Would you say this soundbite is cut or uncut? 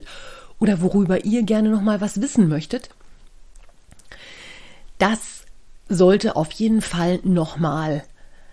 uncut